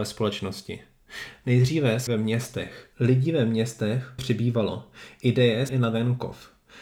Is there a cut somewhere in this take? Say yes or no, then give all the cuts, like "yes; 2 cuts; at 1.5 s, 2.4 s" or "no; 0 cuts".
yes; 4 cuts; at 2.1 s, 2.9 s, 4.2 s, 5.7 s